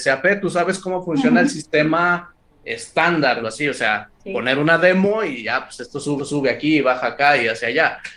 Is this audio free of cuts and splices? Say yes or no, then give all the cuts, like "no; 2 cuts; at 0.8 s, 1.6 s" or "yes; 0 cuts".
no; 3 cuts; at 3.4 s, 4.2 s, 6.2 s